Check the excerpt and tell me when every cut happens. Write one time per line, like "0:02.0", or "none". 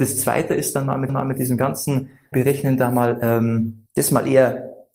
0:01.1
0:02.3
0:03.9